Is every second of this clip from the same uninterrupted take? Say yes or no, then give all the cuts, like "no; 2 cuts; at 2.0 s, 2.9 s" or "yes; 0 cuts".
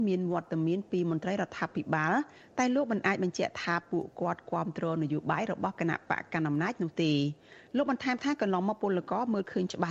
yes; 0 cuts